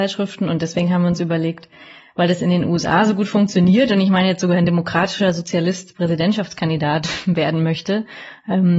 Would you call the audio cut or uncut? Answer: uncut